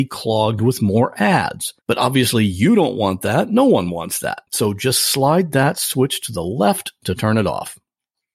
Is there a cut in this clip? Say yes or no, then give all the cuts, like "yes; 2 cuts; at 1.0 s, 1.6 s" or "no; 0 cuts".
yes; 2 cuts; at 1.8 s, 4.5 s